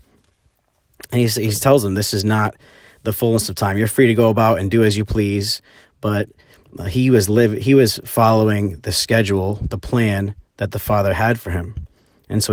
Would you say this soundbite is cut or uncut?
uncut